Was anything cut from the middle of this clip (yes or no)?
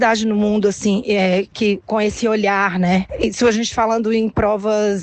no